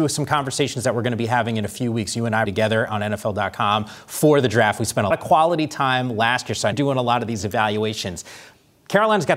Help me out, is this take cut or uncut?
cut